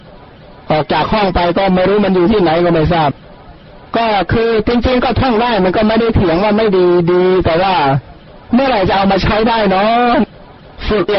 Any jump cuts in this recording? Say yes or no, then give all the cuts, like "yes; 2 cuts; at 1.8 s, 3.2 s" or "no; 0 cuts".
yes; 1 cut; at 8.4 s